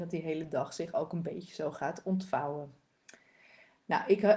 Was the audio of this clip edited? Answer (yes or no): no